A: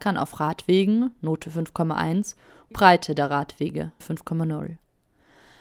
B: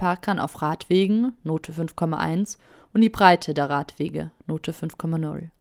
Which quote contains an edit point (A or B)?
A